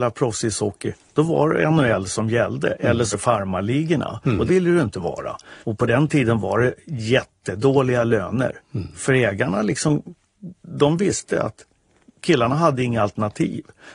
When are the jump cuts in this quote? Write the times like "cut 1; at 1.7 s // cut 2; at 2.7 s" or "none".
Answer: cut 1; at 3.1 s // cut 2; at 4.5 s // cut 3; at 5.6 s